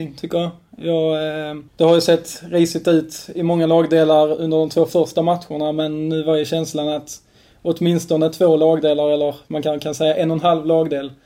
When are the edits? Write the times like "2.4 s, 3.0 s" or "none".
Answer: 1.7 s